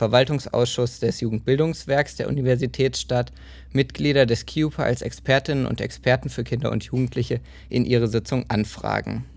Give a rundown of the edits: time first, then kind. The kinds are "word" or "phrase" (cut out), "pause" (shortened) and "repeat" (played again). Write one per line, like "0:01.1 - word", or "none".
none

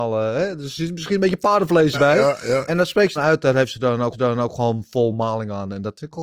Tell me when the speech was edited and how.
0:01.9 - word
0:02.7 - word
0:03.2 - phrase
0:04.1 - repeat

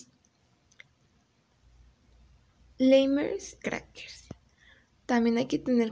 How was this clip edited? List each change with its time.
0:03.6 - word

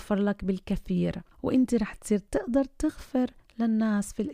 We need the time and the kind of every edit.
0:01.3 - pause

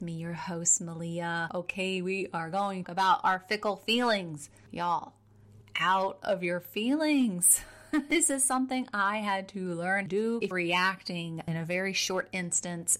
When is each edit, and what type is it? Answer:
0:02.8 - phrase
0:05.6 - word
0:10.1 - phrase
0:10.5 - phrase

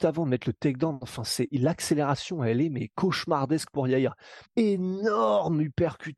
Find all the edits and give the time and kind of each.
0:04.4 - pause

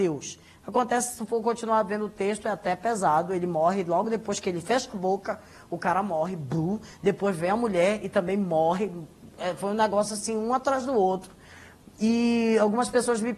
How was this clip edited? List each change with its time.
none

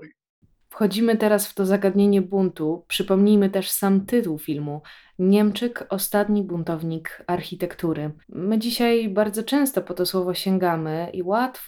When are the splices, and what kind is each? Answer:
0:08.2 - pause

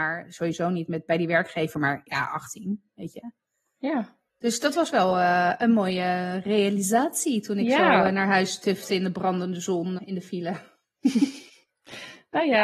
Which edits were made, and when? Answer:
0:04.3 - pause
0:10.0 - word

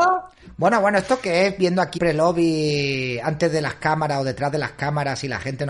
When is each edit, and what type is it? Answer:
0:02.0 - word

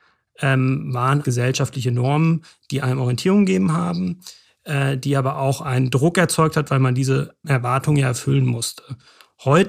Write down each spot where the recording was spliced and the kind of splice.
0:01.2 - word
0:07.4 - word

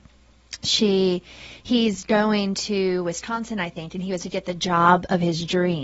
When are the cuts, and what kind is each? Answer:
0:04.2 - word

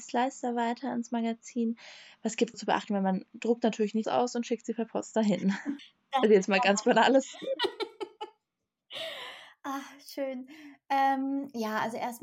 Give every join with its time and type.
0:02.5 - phrase
0:04.0 - phrase
0:05.8 - word

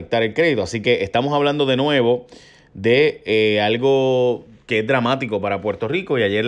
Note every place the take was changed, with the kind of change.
none

